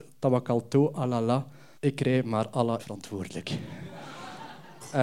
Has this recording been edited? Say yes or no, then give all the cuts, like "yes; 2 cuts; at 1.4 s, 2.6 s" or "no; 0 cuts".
yes; 2 cuts; at 1.7 s, 2.8 s